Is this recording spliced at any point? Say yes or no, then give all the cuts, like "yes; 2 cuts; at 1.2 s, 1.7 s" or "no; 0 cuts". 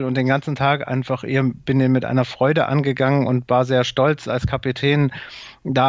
no; 0 cuts